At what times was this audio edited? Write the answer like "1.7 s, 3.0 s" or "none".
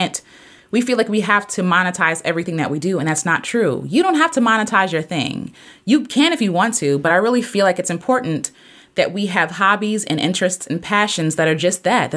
none